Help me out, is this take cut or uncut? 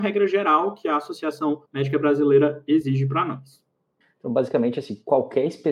cut